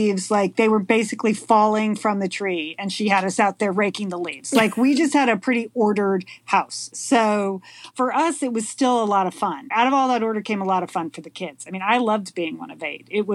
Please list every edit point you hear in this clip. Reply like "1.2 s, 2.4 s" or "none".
none